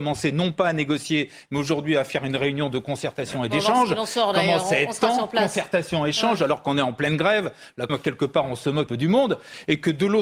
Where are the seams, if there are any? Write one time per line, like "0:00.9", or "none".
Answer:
0:07.9
0:08.9